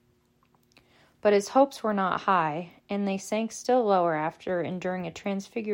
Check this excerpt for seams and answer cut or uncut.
uncut